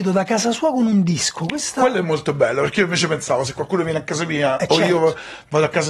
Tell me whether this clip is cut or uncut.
uncut